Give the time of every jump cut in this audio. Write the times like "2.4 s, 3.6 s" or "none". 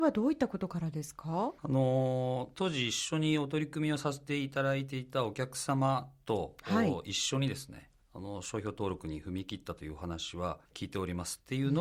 1.6 s, 10.7 s